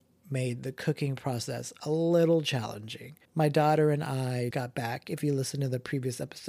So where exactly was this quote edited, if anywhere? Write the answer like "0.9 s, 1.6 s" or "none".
3.2 s, 4.5 s